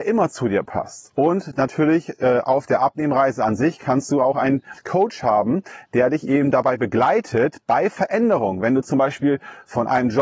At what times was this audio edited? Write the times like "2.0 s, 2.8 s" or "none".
4.8 s

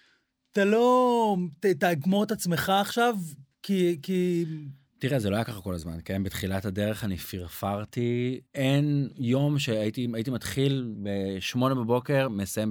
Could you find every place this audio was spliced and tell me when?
8.5 s

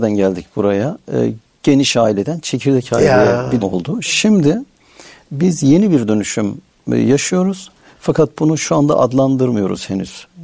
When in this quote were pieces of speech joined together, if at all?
3.6 s

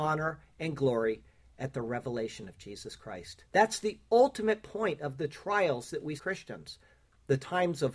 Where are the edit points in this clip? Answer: 3.5 s, 6.2 s

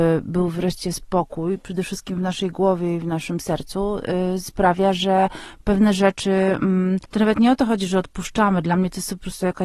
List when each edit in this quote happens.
7.0 s

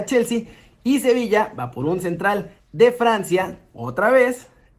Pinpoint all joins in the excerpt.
2.6 s

